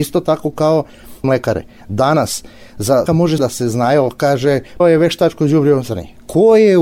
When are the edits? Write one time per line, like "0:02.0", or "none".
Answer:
0:01.2
0:03.1
0:03.4
0:04.8